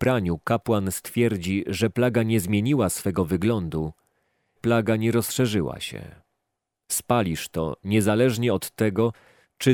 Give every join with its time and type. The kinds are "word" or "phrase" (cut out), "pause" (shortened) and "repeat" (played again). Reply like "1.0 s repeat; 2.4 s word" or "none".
4.6 s phrase